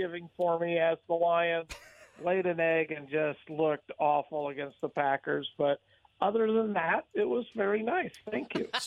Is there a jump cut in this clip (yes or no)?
no